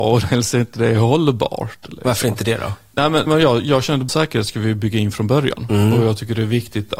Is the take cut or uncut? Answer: cut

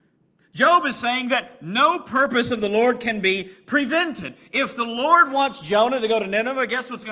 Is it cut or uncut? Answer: uncut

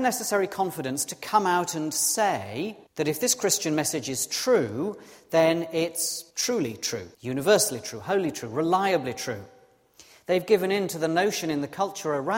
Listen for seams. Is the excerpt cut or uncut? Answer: cut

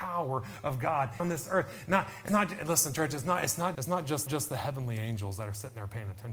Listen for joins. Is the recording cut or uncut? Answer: cut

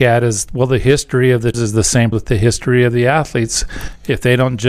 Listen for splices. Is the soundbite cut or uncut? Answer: cut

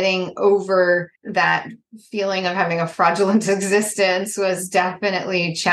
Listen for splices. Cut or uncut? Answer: cut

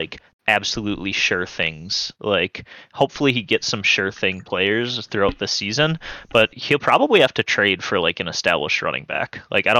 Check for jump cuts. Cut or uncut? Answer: uncut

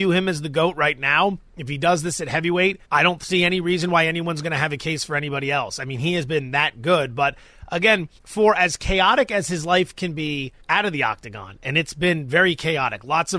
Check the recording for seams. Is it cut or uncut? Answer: cut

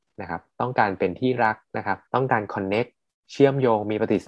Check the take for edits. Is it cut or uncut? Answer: cut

